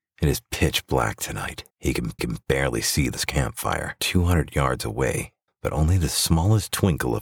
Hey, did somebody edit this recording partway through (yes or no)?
yes